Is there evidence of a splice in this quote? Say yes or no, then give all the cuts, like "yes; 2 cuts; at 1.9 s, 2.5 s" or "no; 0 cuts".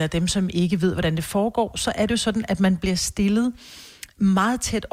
no; 0 cuts